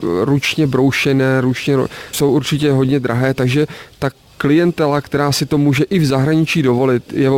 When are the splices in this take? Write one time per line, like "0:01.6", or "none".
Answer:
0:02.1